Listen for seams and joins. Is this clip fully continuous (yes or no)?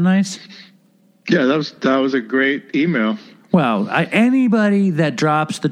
yes